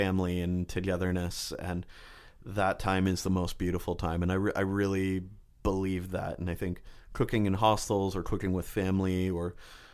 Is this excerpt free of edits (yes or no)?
yes